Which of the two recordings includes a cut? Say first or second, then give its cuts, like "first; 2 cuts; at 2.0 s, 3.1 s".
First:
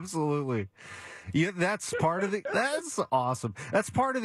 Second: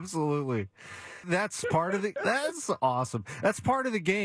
second; 1 cut; at 1.2 s